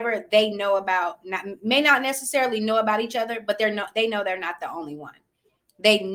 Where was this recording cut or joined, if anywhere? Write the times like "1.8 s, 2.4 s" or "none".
none